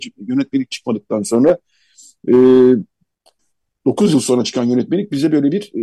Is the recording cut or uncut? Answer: uncut